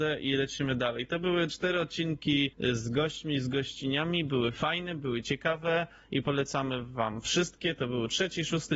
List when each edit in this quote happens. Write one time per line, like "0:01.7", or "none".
0:02.5